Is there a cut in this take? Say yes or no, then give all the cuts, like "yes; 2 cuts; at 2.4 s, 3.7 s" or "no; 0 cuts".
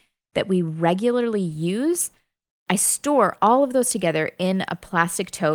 no; 0 cuts